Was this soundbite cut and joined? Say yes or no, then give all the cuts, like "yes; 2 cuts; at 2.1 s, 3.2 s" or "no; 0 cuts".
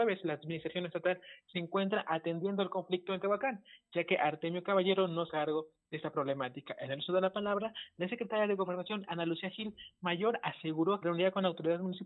yes; 2 cuts; at 5.3 s, 11.0 s